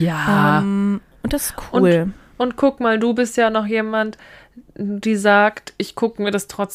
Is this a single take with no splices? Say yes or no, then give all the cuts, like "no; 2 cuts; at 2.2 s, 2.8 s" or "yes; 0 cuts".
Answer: yes; 0 cuts